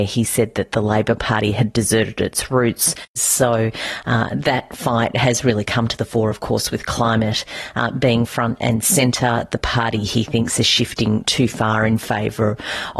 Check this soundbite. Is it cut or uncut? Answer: uncut